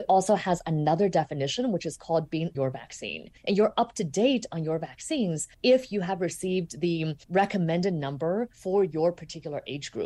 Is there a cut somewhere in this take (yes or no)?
yes